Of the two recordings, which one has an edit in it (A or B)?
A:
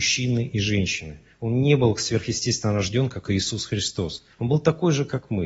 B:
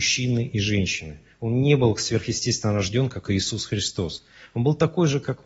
A